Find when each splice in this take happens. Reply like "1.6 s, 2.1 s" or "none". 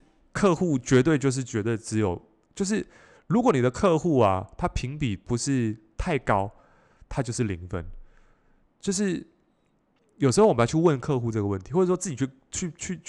none

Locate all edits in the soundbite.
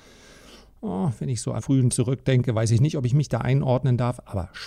1.6 s, 1.9 s

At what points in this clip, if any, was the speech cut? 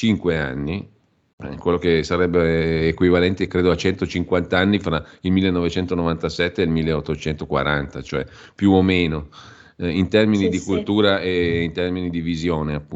none

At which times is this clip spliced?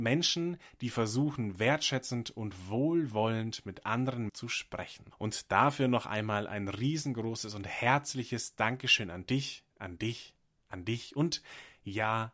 4.3 s, 9.7 s

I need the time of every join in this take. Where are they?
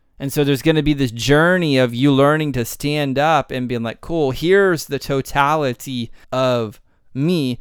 6.2 s

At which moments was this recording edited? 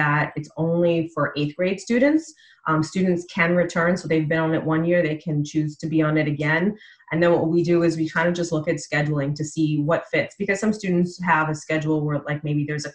none

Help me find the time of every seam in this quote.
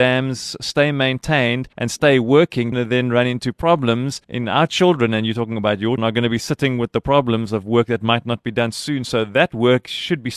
1.7 s, 2.7 s, 4.2 s, 6.0 s

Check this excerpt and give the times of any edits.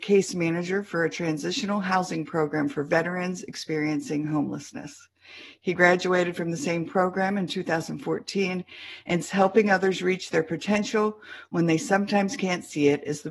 9.2 s

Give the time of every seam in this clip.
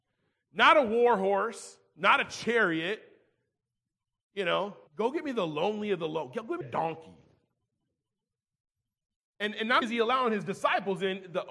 4.9 s, 6.6 s, 9.8 s

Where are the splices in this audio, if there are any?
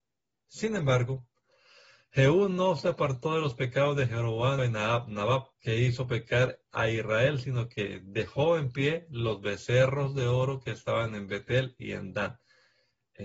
4.6 s, 5.5 s

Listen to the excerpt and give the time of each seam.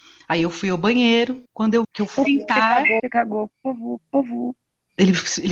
1.5 s, 1.8 s, 2.2 s, 3.0 s

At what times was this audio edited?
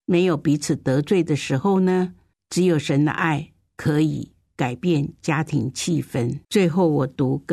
6.4 s

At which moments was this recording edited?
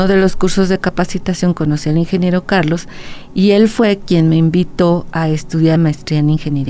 5.8 s

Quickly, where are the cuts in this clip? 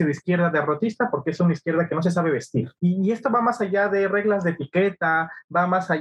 2.8 s

